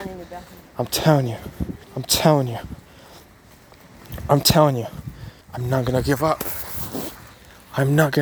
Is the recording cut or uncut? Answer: cut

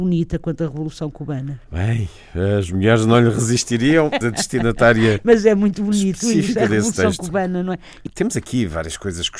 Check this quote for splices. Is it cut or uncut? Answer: cut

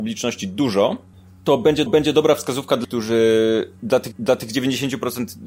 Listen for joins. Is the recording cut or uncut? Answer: cut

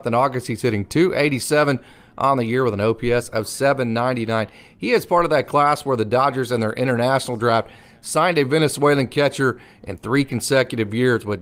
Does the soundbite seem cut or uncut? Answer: uncut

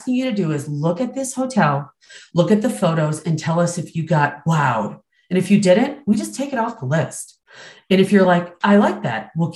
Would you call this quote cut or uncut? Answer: uncut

